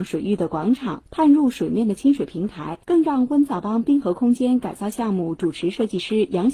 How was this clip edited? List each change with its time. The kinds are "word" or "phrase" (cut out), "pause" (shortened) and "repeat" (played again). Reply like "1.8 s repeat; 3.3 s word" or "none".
2.8 s pause